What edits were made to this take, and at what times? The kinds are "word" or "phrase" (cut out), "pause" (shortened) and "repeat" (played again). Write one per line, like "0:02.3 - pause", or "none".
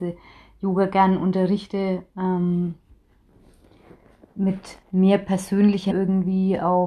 0:04.8 - pause
0:05.9 - word